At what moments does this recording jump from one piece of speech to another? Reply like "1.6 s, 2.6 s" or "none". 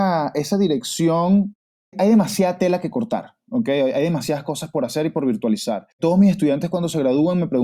5.9 s